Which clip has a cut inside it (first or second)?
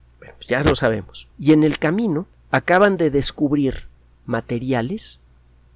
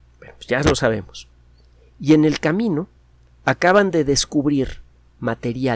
first